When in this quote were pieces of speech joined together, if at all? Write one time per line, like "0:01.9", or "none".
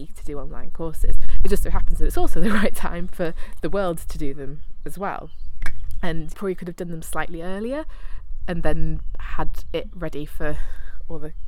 0:06.3